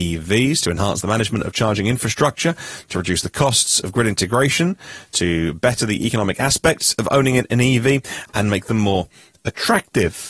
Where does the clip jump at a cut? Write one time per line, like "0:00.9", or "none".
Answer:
none

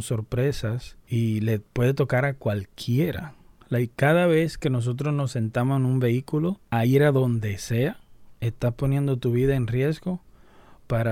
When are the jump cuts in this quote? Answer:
none

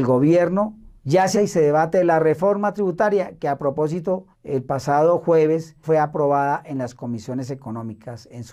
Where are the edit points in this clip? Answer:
0:01.0
0:01.3
0:04.3
0:05.8

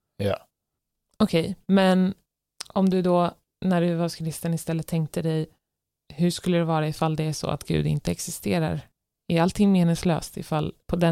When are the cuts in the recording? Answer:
none

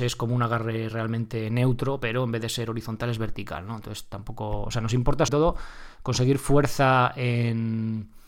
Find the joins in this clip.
0:05.3

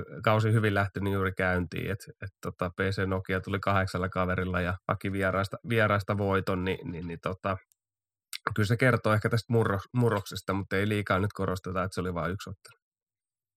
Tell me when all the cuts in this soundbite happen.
0:04.8

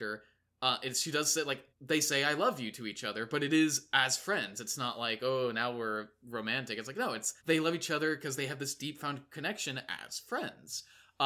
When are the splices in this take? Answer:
0:01.7
0:07.4

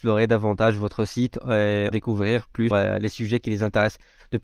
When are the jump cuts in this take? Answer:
0:01.9
0:02.7

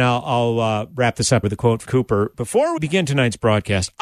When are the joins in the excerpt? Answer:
0:01.4
0:01.9
0:02.8

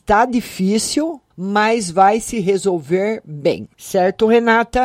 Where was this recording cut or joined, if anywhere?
0:01.3
0:03.7

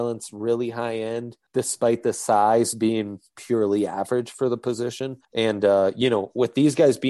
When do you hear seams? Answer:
0:01.5
0:05.2

